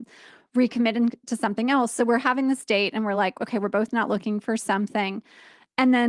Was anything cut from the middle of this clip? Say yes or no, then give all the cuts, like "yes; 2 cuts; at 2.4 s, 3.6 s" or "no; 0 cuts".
no; 0 cuts